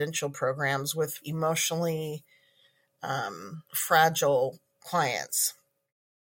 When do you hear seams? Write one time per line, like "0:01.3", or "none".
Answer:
0:01.2
0:03.7